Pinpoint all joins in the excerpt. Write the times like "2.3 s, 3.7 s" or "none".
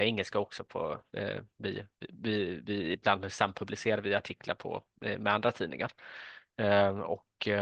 none